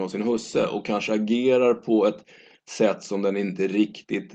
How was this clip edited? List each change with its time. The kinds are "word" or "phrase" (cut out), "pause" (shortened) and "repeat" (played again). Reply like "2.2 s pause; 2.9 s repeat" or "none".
none

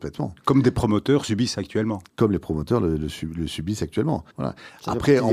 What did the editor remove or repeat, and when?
2.1 s pause; 4.3 s pause

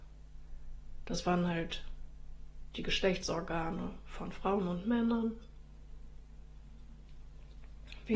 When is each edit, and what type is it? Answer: none

